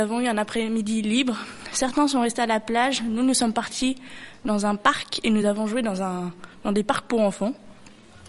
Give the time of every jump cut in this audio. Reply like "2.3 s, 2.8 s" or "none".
none